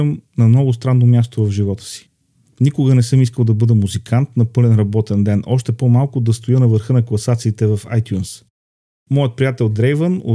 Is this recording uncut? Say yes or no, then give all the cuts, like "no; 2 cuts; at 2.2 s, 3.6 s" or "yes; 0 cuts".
yes; 0 cuts